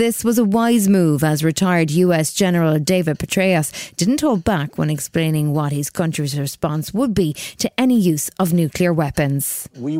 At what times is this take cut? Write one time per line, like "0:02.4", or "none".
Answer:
none